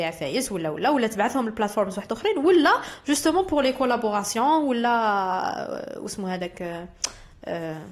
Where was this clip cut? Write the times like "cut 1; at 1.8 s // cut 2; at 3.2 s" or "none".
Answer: none